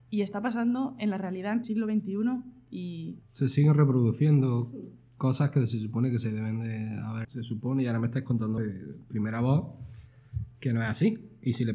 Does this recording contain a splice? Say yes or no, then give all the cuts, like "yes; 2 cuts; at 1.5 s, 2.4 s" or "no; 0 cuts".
yes; 4 cuts; at 1.6 s, 3.2 s, 7.2 s, 8.6 s